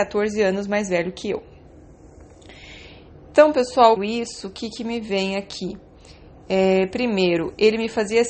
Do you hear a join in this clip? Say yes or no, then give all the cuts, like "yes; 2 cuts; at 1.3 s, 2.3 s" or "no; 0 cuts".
yes; 1 cut; at 4.0 s